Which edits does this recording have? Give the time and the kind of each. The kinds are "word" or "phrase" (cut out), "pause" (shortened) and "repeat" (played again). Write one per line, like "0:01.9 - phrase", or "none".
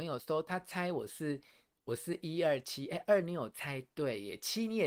none